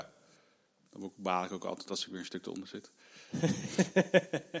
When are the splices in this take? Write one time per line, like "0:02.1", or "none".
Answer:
none